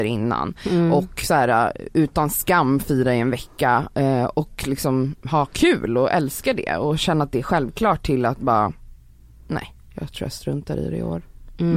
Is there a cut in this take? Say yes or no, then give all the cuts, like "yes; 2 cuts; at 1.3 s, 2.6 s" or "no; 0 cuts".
no; 0 cuts